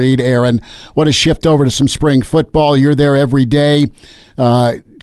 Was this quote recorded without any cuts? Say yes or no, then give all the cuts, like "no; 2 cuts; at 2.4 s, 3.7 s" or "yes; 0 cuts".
yes; 0 cuts